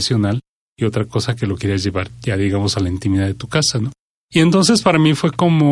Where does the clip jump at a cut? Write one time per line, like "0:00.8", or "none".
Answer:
none